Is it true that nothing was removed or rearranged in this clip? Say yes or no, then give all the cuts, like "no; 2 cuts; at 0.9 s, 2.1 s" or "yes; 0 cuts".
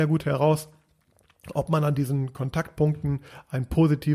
yes; 0 cuts